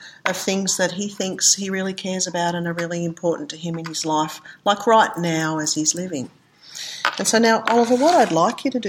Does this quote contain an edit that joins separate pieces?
no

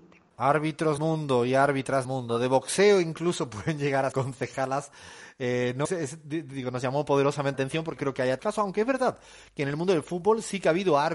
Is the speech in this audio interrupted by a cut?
yes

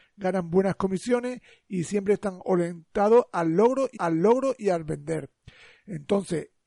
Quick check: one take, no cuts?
no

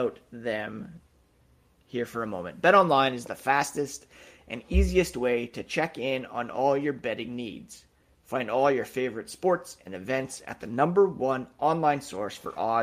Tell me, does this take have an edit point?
no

